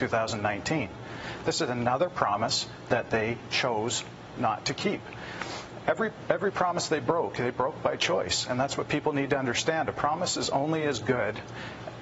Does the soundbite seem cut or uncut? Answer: uncut